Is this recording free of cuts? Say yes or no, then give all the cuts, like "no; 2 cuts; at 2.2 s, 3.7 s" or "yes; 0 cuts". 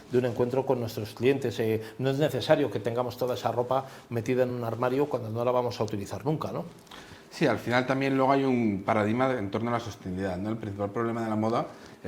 yes; 0 cuts